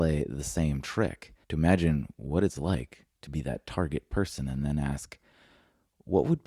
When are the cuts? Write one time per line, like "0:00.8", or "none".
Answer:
0:01.4
0:03.1